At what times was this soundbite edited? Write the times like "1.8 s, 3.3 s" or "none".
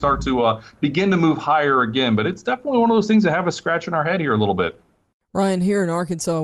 none